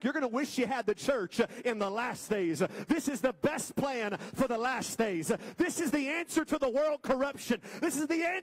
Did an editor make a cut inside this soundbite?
no; 0 cuts

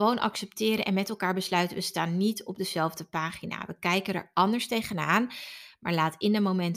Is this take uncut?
yes; 0 cuts

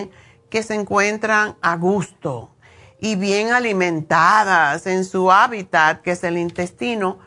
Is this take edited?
no; 0 cuts

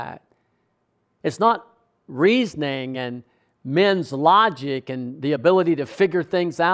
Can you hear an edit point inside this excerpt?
no; 0 cuts

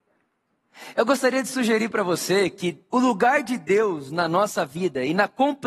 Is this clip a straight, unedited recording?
no; 1 cut; at 2.9 s

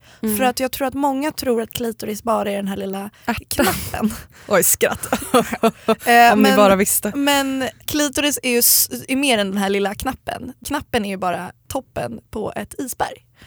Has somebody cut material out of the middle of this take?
no; 0 cuts

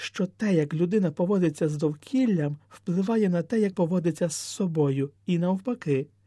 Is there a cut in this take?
yes; 2 cuts; at 3.7 s, 5.2 s

